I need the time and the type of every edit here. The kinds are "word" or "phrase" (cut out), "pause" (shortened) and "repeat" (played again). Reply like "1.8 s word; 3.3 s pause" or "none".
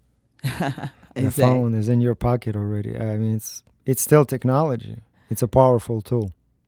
5.1 s pause